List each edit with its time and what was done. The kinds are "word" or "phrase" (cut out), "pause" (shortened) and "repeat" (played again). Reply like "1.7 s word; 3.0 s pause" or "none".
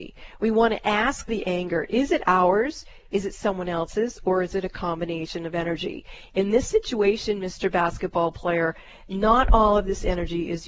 none